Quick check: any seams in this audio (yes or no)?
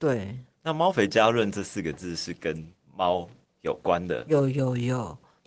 no